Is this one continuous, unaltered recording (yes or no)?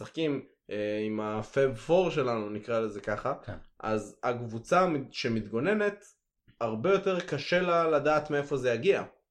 yes